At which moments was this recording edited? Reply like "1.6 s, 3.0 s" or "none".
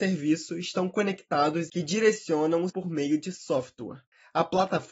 1.7 s, 2.7 s